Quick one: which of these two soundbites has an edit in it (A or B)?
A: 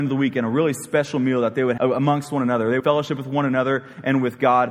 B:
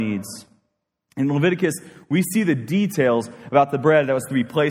A